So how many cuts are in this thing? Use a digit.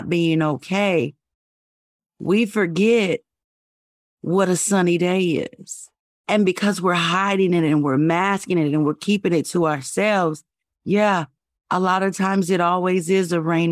0